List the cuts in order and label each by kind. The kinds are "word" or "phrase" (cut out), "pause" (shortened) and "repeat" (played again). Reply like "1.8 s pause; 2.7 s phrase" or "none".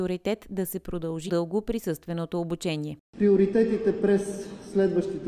1.3 s word